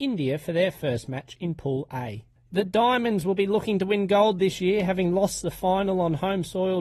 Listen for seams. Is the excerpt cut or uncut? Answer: uncut